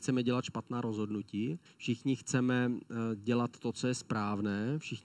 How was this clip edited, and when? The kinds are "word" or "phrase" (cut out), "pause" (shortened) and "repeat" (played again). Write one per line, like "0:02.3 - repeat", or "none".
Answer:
0:01.7 - pause